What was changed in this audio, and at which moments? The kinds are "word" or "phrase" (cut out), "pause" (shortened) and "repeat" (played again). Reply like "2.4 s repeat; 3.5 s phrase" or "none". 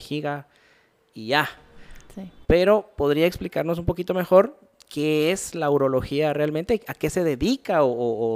none